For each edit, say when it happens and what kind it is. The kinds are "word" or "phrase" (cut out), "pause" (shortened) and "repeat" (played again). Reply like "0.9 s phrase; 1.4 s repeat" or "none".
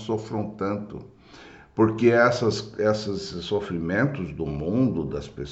none